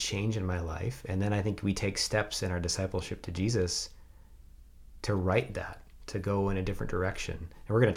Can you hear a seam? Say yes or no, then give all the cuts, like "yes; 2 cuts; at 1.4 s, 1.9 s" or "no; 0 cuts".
no; 0 cuts